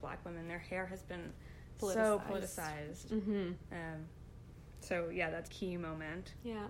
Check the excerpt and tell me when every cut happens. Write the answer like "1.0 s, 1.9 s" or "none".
5.5 s